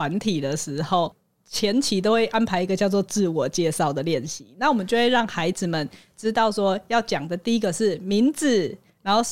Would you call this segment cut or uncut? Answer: uncut